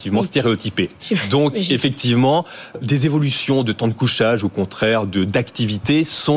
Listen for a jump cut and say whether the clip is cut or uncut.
cut